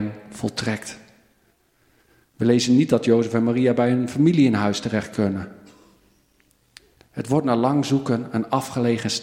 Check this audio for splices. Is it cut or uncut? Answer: uncut